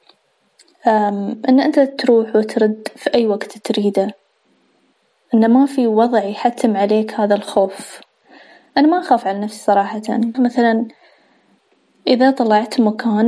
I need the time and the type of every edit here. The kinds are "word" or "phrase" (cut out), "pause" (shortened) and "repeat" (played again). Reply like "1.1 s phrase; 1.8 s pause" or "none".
10.3 s word

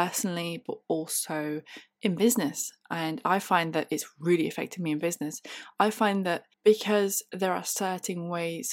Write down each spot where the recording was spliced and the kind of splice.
6.5 s pause

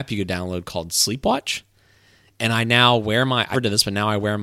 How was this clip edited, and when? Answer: 3.5 s word

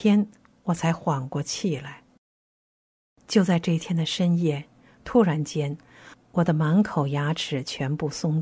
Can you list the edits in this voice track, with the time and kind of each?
none

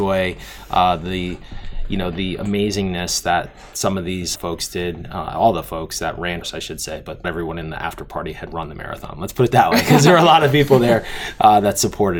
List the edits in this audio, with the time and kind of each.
4.4 s word; 6.4 s word; 7.2 s word

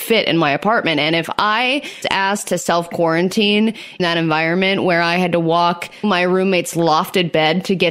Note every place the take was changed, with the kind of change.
2.0 s word; 4.0 s word; 6.0 s word

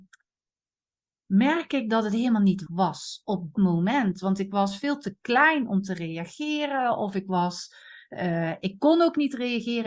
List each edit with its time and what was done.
2.7 s word; 3.6 s word

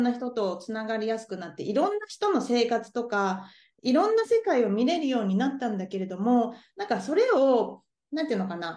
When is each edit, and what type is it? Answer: none

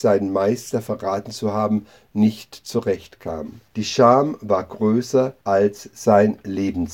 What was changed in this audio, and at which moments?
3.7 s pause; 5.4 s pause

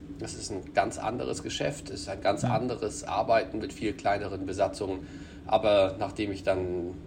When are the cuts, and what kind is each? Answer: none

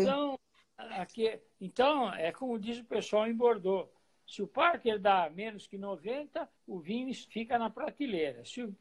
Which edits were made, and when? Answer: 6.6 s pause; 7.3 s pause

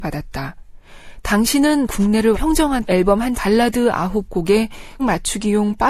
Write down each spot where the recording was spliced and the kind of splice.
1.9 s word; 2.3 s word; 2.8 s word; 3.3 s word; 5.0 s word

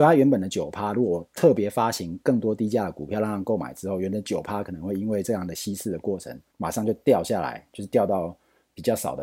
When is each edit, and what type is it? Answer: 6.5 s pause

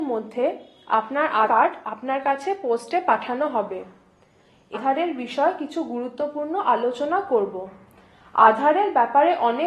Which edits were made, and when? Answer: 1.5 s word; 4.7 s phrase

